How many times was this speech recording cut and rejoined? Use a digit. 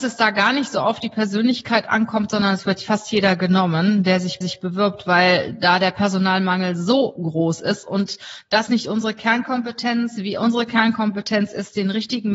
2